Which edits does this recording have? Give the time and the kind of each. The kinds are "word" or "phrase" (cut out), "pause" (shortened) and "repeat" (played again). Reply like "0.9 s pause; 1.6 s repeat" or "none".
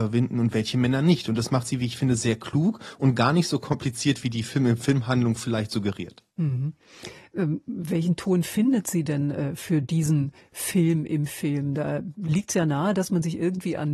6.3 s pause